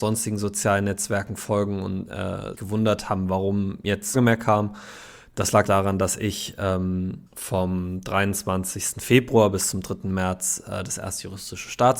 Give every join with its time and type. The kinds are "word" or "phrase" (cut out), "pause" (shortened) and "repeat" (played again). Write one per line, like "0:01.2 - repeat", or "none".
0:02.5 - word
0:04.1 - phrase
0:05.6 - word
0:07.3 - pause